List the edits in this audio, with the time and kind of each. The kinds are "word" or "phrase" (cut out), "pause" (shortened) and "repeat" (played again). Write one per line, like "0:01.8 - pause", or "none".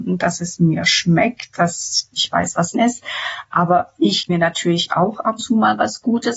0:02.1 - word
0:02.7 - word
0:04.3 - word
0:05.4 - word